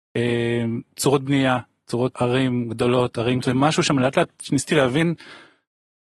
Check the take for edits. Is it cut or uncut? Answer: cut